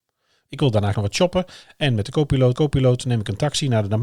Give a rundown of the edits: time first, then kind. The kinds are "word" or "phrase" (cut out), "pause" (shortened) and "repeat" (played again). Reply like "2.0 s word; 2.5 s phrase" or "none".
0.9 s word; 2.6 s repeat